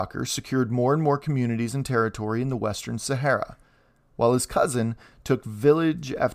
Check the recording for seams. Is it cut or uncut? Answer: uncut